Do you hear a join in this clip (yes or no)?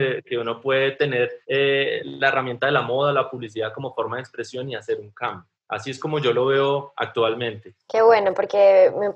yes